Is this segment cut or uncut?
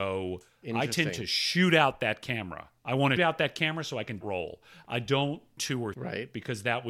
cut